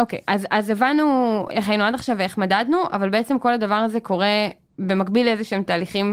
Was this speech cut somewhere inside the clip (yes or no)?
no